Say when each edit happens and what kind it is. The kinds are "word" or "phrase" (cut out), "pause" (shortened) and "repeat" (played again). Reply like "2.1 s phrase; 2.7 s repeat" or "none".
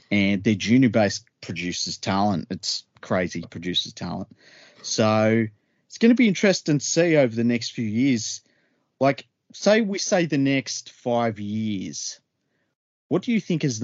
1.4 s word; 3.4 s word